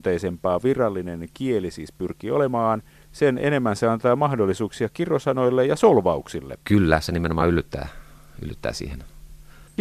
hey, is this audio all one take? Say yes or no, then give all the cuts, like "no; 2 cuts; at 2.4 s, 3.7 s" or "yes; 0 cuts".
yes; 0 cuts